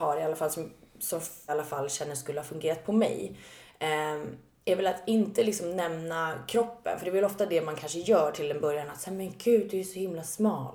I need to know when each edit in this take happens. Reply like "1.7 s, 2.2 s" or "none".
1.5 s